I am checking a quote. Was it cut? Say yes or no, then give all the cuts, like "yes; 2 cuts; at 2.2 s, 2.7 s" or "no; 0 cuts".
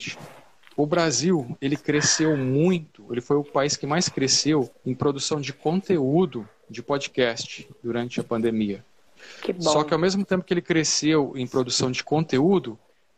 yes; 1 cut; at 4.7 s